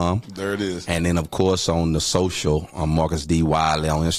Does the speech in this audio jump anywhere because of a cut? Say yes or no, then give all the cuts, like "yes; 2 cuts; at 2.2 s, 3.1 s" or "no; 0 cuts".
no; 0 cuts